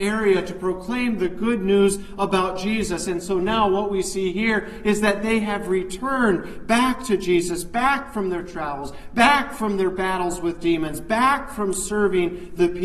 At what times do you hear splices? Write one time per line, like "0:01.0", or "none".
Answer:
none